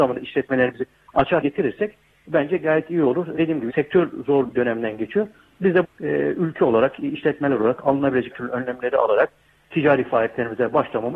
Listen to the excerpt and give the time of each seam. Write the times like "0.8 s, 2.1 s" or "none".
1.4 s, 3.4 s, 3.7 s, 4.5 s, 5.8 s, 8.3 s

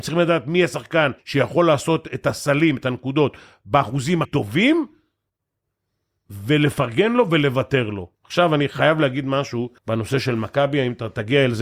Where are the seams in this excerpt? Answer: 1.2 s, 4.2 s, 8.1 s, 9.8 s

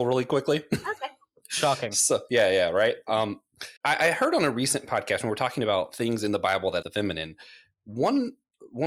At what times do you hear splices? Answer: 3.8 s, 6.8 s

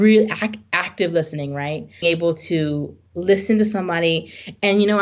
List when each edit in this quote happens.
2.0 s

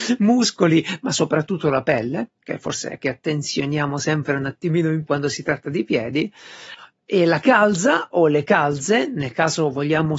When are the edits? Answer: 3.0 s, 5.0 s

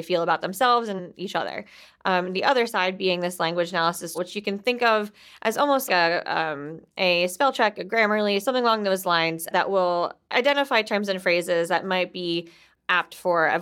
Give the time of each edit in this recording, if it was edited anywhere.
4.1 s, 5.9 s

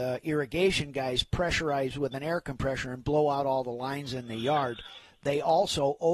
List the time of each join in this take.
none

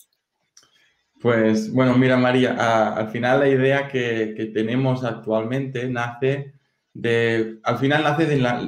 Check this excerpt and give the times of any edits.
none

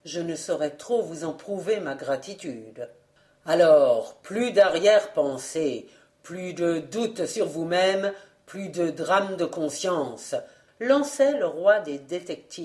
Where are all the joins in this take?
none

